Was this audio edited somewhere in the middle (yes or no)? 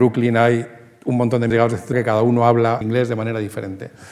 yes